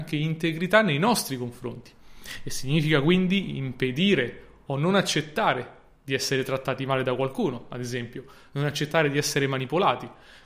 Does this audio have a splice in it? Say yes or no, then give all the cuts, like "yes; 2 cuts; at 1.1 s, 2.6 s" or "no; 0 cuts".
no; 0 cuts